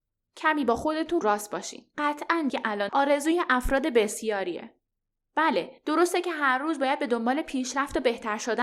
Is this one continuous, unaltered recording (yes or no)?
no